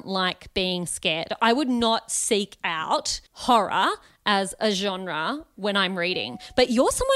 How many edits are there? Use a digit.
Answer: 1